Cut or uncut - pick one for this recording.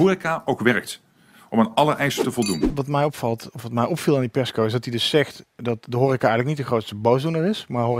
uncut